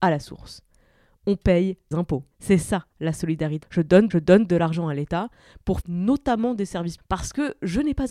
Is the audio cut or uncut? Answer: cut